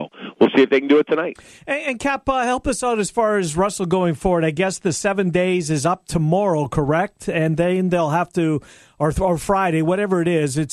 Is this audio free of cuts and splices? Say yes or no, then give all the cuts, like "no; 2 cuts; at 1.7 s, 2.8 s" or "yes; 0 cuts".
yes; 0 cuts